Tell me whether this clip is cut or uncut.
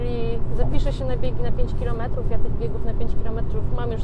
uncut